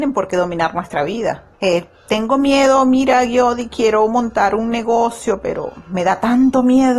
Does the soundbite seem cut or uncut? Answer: cut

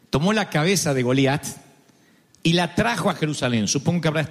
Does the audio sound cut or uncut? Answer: uncut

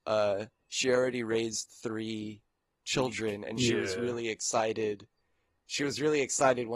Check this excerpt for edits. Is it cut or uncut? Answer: uncut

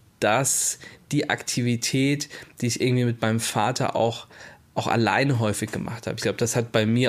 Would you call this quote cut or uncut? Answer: uncut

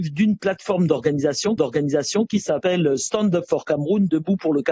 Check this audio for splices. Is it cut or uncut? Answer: cut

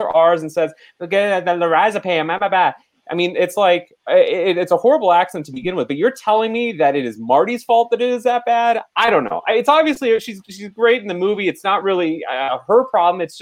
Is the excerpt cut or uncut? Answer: uncut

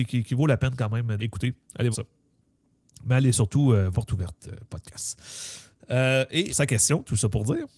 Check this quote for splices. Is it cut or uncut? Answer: cut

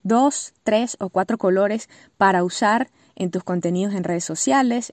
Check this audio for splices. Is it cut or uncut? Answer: uncut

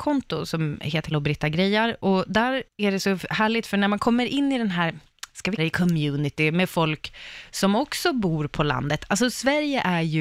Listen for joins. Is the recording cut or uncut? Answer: cut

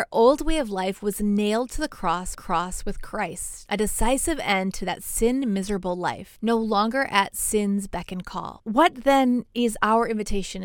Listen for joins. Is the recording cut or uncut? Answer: cut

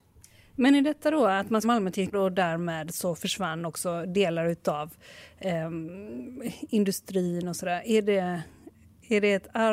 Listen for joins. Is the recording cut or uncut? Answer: cut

